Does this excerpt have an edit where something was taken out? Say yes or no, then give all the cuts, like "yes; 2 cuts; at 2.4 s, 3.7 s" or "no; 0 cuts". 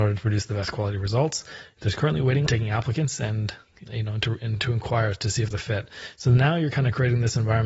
yes; 3 cuts; at 2.5 s, 3.8 s, 5.5 s